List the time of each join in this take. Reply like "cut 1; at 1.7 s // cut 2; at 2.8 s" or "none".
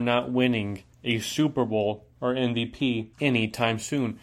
cut 1; at 0.9 s // cut 2; at 3.1 s